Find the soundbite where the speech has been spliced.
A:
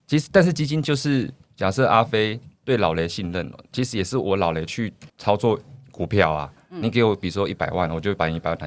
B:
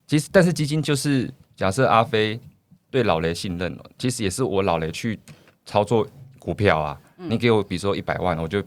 A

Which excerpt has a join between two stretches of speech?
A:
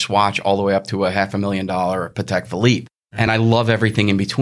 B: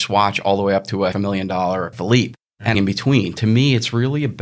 B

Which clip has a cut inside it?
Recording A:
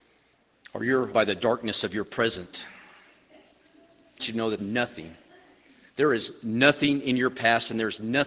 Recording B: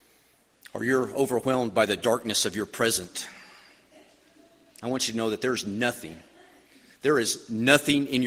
A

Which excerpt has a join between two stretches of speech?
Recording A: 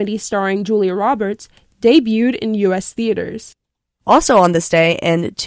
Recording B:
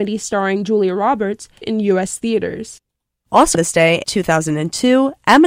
B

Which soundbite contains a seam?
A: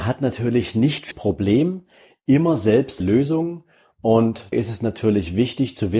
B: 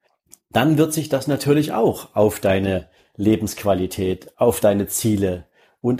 A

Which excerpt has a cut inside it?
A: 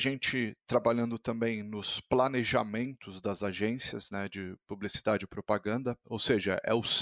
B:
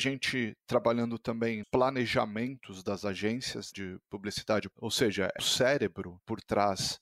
B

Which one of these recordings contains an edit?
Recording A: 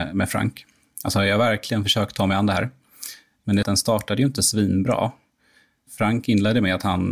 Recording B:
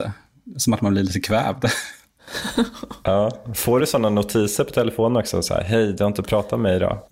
A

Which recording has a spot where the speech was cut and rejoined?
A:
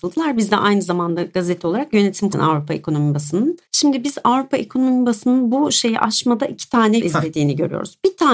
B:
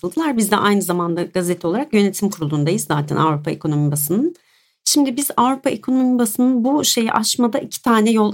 A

